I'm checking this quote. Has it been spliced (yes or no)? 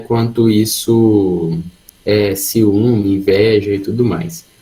yes